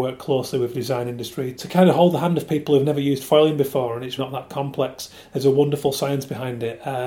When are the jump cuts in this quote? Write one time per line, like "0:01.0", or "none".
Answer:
0:01.5
0:04.2